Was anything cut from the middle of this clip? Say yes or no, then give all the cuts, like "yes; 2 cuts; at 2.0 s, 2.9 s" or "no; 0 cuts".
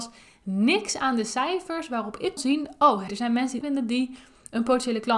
yes; 3 cuts; at 2.4 s, 3.1 s, 3.6 s